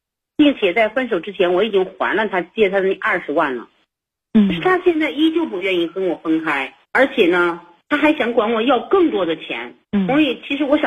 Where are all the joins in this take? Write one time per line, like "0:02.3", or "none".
0:06.8
0:09.8